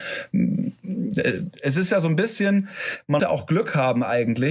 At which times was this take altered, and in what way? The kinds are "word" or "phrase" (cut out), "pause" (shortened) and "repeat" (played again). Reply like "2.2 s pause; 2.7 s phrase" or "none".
3.2 s word

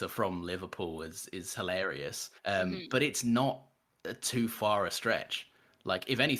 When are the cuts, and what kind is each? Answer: 2.4 s pause

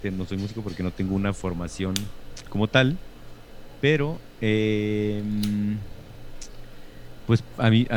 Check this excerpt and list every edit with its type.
2.4 s word

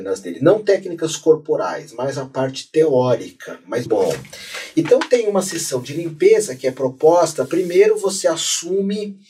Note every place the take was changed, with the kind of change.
3.9 s word

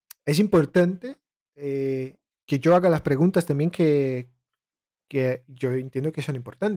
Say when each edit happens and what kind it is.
none

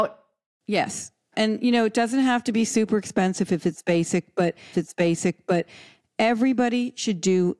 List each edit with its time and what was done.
4.7 s repeat

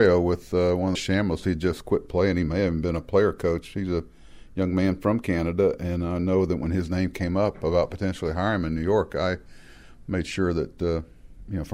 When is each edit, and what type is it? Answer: 0.9 s phrase

